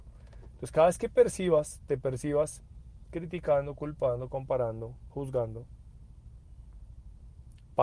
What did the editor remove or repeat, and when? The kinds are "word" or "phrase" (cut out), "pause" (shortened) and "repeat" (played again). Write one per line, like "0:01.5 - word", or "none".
none

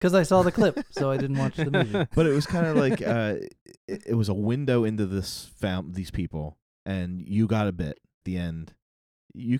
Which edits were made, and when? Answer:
0:03.8 - pause
0:08.2 - phrase

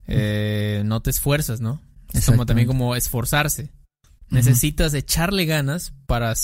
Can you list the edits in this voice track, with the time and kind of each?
none

